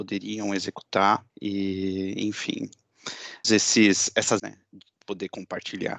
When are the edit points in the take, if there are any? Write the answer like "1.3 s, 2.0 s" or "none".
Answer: 1.3 s, 3.4 s, 4.4 s, 5.0 s